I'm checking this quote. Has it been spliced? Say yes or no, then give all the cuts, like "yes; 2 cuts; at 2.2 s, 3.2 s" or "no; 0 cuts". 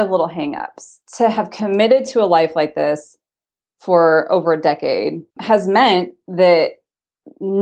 yes; 2 cuts; at 1.1 s, 5.3 s